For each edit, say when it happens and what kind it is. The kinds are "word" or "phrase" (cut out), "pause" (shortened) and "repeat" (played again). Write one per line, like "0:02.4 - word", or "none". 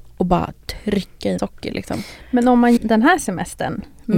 0:01.4 - word
0:02.8 - word